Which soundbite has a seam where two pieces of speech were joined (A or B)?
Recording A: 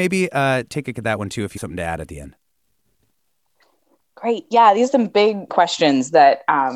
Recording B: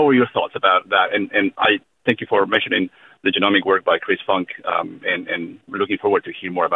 A